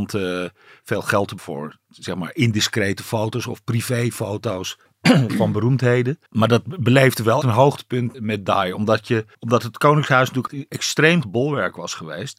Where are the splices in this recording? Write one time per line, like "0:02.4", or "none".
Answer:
0:01.4
0:04.9
0:06.3
0:07.4
0:08.1
0:09.3
0:10.5
0:11.2